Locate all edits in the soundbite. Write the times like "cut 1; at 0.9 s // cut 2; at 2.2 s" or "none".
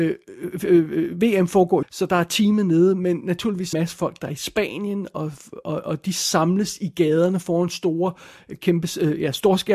cut 1; at 1.8 s // cut 2; at 3.7 s